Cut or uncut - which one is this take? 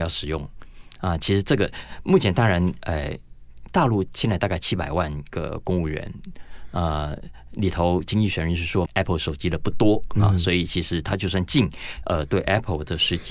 cut